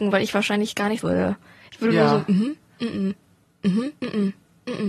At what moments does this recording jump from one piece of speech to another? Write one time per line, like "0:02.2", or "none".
0:01.0
0:04.0

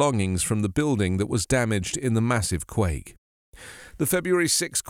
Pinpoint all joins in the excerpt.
none

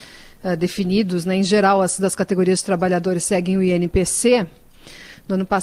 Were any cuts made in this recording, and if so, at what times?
0:02.0

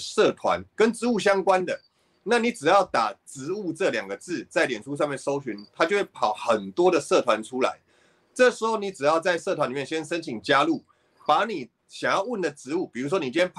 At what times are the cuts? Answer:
0:11.8

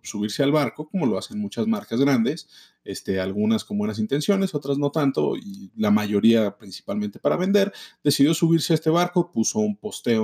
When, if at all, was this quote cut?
none

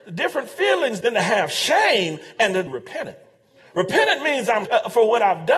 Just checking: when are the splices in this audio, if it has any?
0:01.0
0:02.7
0:04.6

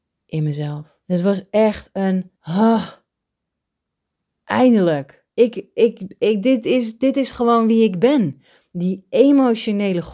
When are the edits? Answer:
0:01.0
0:02.3
0:05.3

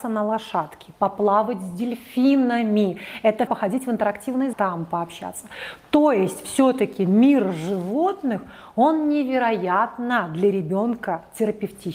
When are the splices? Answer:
0:03.5
0:04.5

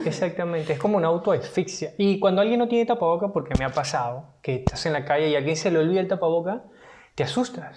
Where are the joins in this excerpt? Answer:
none

